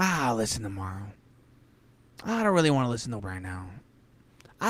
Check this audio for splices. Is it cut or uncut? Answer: cut